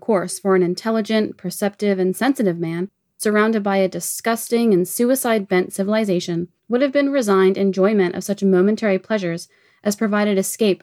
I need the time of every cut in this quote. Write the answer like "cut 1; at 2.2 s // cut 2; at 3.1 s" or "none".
cut 1; at 6.6 s